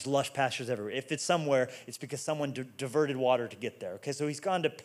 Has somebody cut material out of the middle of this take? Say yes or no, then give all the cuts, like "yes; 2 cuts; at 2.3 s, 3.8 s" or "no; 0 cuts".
no; 0 cuts